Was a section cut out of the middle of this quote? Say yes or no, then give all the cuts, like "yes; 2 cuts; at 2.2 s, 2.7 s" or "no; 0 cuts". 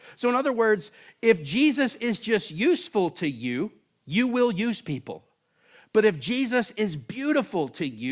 no; 0 cuts